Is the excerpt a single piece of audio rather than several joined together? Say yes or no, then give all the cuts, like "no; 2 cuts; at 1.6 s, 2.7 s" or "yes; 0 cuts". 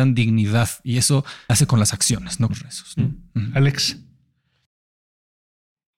no; 2 cuts; at 1.5 s, 2.5 s